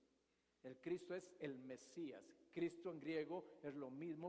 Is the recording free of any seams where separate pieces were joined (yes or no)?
yes